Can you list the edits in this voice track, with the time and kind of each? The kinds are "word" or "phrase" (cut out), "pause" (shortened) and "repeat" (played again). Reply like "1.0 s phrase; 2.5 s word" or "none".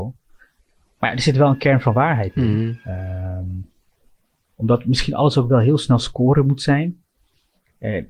none